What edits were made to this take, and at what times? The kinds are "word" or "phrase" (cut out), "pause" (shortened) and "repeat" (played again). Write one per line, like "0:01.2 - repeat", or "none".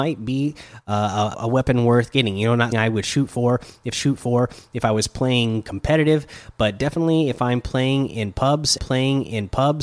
0:01.3 - word
0:02.7 - word
0:03.9 - repeat
0:08.8 - repeat